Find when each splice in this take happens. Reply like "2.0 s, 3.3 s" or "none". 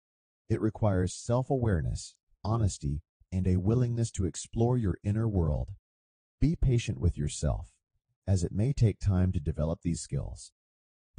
none